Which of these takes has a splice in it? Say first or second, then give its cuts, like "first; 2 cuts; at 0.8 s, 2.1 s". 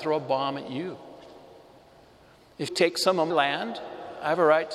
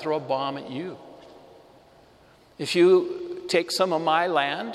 first; 2 cuts; at 2.7 s, 3.3 s